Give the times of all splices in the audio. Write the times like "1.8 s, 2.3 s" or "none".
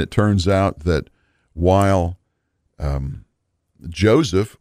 none